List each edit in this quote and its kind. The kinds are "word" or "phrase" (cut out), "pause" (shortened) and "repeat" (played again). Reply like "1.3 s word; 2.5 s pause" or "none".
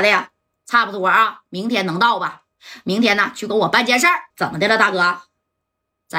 4.3 s pause